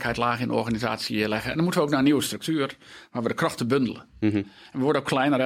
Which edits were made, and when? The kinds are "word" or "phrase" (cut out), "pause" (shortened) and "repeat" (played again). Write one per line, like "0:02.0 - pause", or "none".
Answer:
none